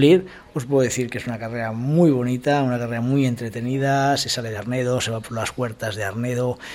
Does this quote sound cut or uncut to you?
uncut